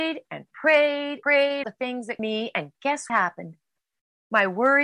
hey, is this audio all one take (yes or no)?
no